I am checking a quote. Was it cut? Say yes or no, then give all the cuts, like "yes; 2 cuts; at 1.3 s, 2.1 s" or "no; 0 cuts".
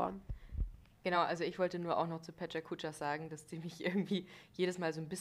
no; 0 cuts